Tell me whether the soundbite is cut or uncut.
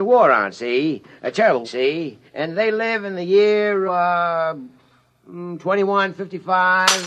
cut